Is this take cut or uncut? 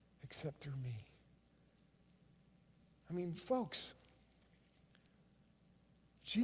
uncut